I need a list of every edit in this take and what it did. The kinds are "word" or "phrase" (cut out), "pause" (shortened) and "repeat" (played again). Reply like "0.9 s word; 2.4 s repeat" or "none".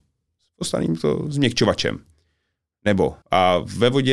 3.2 s pause